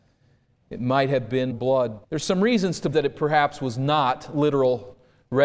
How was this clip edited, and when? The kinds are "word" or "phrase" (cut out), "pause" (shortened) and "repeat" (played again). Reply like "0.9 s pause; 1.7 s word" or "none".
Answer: 1.5 s word; 2.0 s pause; 2.9 s word